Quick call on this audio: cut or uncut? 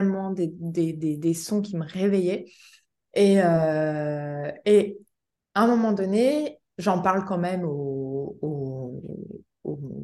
uncut